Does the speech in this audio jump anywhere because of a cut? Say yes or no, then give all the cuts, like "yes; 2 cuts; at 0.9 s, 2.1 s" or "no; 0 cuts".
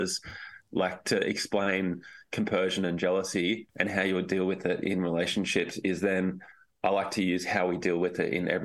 no; 0 cuts